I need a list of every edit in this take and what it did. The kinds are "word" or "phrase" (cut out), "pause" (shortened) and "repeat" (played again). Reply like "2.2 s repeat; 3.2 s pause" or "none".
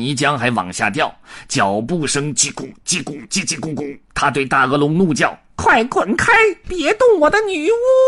4.0 s pause